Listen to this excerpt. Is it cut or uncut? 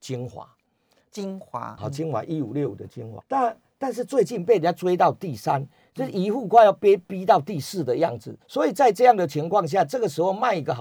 cut